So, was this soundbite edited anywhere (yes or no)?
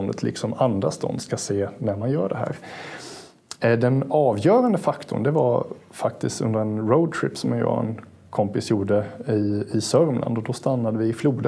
no